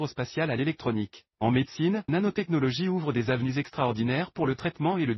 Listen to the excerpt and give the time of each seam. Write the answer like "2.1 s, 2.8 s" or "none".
1.3 s, 2.1 s